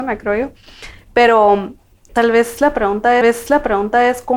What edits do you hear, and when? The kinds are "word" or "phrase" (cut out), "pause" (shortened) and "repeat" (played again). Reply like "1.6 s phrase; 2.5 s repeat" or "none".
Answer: 2.1 s word; 3.2 s repeat